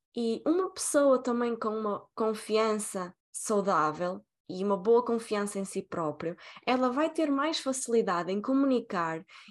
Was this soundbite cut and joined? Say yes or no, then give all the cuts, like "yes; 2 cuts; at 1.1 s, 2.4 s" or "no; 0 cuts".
yes; 1 cut; at 3.2 s